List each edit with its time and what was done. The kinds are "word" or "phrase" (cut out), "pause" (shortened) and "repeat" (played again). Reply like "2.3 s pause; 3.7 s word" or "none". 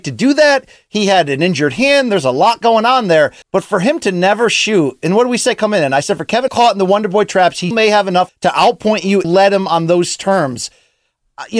3.4 s pause; 6.5 s phrase; 7.7 s word; 8.3 s phrase; 9.2 s phrase